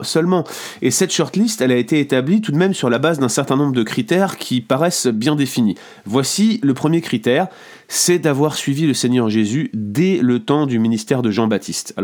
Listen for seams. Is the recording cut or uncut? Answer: uncut